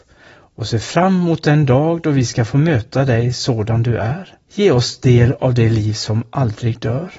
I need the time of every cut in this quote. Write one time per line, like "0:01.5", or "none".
0:04.4